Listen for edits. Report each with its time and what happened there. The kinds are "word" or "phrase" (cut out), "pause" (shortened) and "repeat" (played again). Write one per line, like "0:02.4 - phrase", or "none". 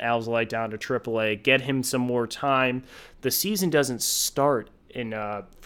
none

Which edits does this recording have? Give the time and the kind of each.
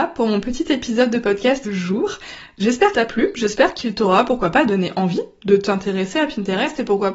0:01.6 - word
0:02.9 - word

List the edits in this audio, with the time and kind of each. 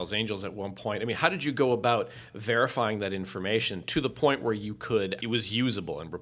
0:05.2 - word

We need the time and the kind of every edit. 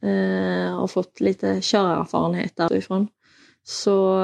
0:02.7 - word

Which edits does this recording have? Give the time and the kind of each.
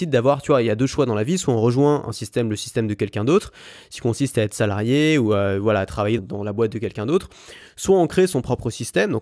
0:06.2 - word

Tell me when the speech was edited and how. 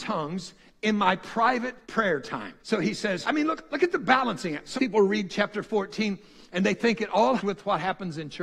0:01.8 - pause
0:02.6 - pause
0:03.2 - word
0:04.8 - word
0:07.4 - phrase

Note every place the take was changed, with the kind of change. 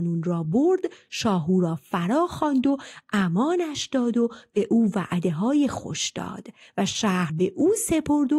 0:07.3 - word

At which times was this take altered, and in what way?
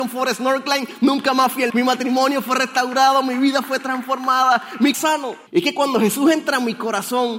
0:01.7 - word
0:04.9 - phrase
0:05.5 - pause

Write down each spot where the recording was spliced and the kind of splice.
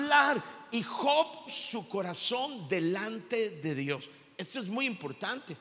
0:01.5 - word

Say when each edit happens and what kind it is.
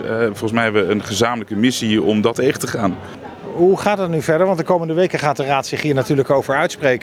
0:02.3 - word

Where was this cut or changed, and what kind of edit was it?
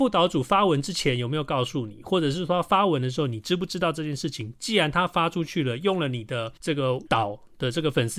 0:06.6 - pause
0:07.1 - word

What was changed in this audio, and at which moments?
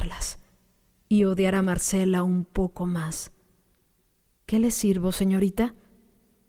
none

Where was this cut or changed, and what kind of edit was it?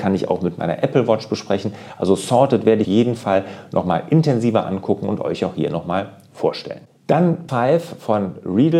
0:02.8 - phrase
0:07.5 - word

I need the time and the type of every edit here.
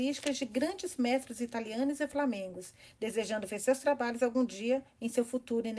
none

